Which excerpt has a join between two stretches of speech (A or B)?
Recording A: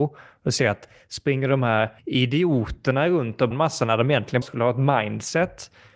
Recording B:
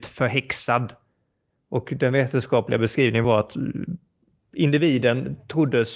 A